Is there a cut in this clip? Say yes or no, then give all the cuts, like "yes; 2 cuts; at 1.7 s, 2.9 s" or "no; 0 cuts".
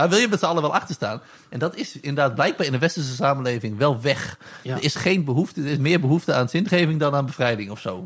no; 0 cuts